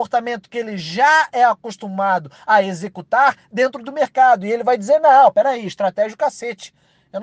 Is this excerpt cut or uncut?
uncut